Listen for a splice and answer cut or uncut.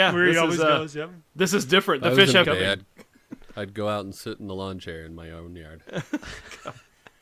cut